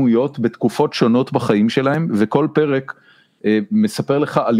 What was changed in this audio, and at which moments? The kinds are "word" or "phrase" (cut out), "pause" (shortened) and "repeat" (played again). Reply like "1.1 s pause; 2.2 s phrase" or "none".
none